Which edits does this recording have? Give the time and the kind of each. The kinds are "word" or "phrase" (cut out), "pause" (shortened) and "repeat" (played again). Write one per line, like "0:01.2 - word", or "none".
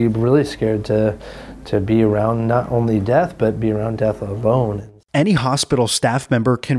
none